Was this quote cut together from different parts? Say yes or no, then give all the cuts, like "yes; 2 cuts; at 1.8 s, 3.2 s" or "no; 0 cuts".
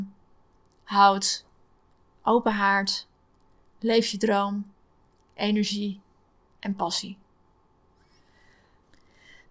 no; 0 cuts